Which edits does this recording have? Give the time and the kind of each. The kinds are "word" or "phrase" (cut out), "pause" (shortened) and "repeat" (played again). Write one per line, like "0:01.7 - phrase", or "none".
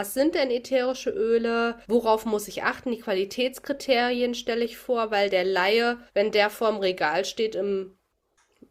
0:01.8 - pause
0:06.1 - pause